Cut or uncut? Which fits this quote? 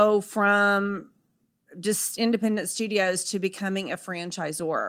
uncut